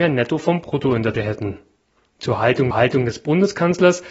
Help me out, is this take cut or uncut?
cut